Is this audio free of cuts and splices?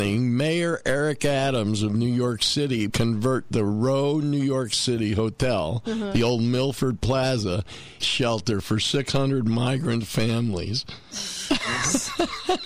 no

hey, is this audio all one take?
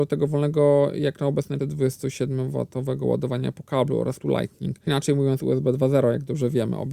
no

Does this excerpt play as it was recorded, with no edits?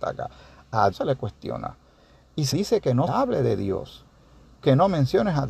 no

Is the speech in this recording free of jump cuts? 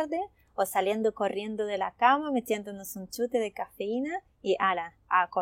yes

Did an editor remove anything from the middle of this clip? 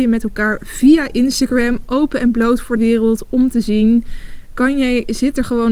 yes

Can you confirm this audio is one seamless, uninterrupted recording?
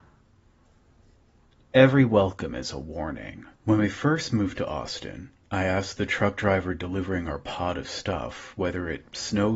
no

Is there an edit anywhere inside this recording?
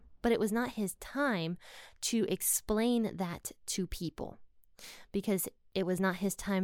no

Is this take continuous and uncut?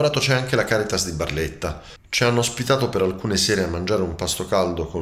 yes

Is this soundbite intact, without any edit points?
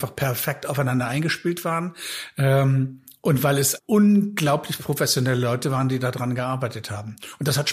no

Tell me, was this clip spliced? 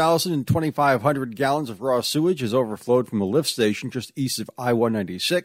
no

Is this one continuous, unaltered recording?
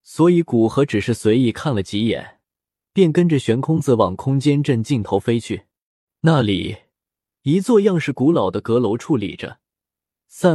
yes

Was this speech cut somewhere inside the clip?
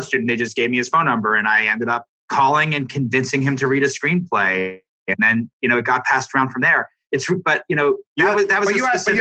no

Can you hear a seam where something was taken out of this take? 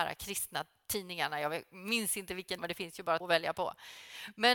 yes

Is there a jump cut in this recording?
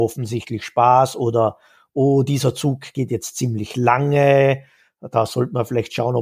no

